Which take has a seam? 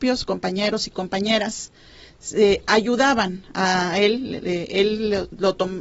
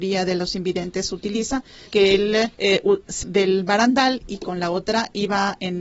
second; 3 cuts; at 1.9 s, 2.5 s, 3.2 s

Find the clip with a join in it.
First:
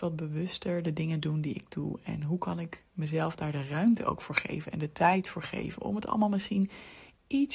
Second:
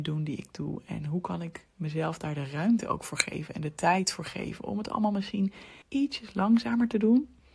second; 1 cut; at 5.8 s

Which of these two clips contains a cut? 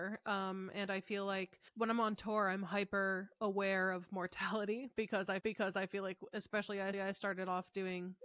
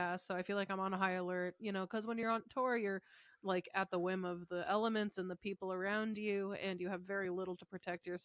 first; 3 cuts; at 1.7 s, 5.4 s, 6.9 s

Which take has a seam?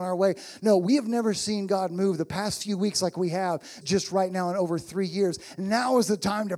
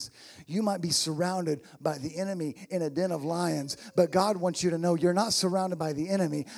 first; 1 cut; at 3.8 s

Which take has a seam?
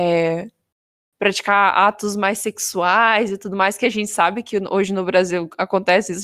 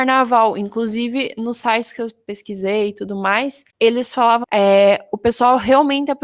second; 2 cuts; at 3.7 s, 4.4 s

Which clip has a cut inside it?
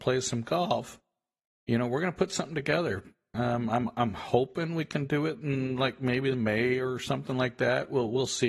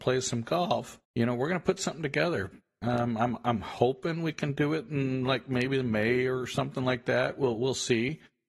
second; 1 cut; at 1.0 s

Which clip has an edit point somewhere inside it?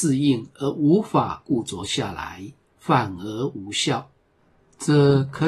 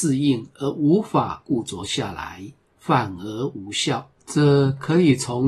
second; 1 cut; at 4.2 s

